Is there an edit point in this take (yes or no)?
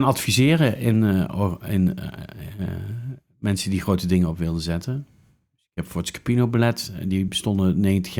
no